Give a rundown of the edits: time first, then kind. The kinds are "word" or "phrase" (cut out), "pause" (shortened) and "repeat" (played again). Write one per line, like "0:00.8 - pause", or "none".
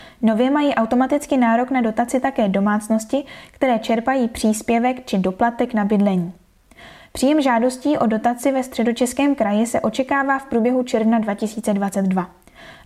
none